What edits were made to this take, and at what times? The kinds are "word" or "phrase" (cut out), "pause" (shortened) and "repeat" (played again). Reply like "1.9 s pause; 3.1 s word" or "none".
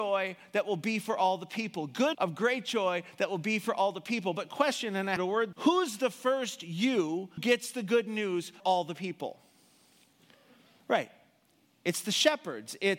2.1 s word; 5.2 s word; 5.5 s word; 7.4 s word; 8.6 s word